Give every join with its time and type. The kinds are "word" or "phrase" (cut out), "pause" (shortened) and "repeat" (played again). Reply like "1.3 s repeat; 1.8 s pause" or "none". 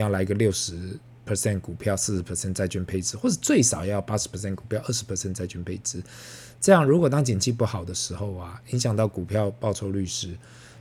none